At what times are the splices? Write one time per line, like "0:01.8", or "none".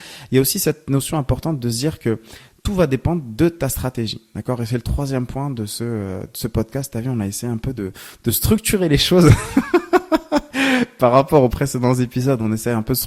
none